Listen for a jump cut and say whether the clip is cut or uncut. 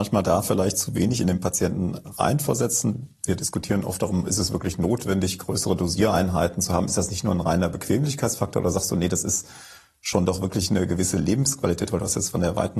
uncut